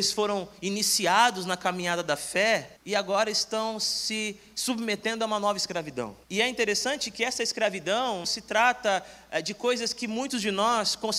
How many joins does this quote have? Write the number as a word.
three